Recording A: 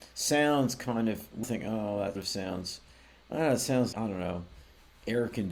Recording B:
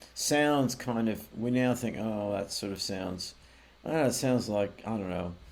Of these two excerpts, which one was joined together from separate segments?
A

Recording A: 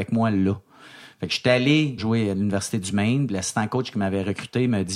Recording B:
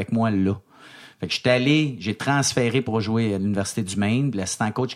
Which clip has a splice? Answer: A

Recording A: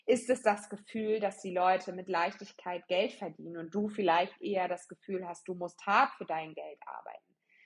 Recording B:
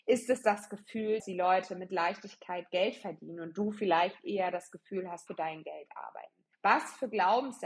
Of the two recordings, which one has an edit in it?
B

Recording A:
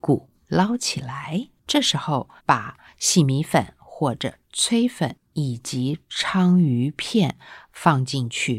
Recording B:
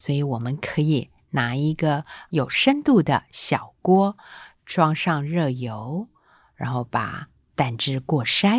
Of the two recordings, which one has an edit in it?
A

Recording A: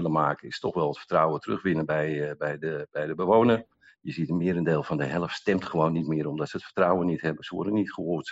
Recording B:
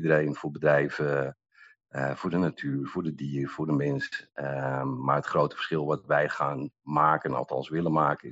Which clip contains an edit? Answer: A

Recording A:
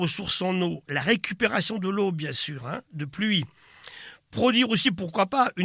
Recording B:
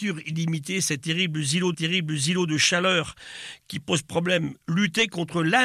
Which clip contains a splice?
B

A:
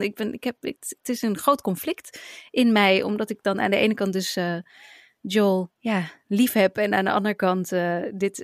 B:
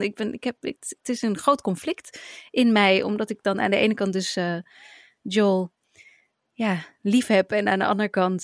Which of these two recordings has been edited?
A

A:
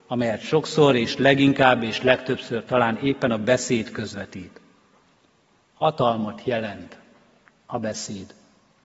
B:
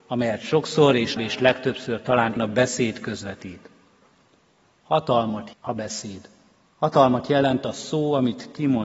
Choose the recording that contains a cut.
B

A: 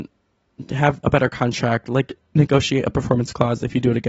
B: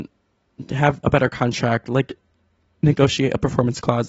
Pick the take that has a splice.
A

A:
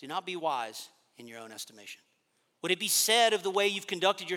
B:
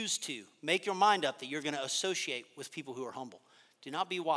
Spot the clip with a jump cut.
A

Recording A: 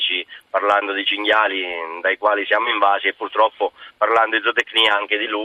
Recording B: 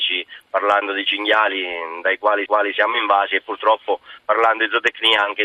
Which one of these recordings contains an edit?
B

